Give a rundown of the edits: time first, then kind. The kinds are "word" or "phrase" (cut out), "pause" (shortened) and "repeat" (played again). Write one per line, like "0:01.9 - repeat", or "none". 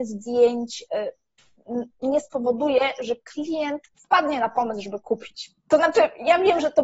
0:03.9 - pause